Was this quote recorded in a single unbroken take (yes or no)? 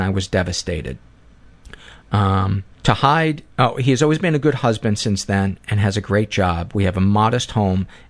no